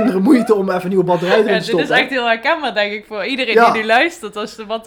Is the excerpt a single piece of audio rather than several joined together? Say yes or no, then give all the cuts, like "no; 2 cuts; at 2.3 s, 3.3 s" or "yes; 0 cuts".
yes; 0 cuts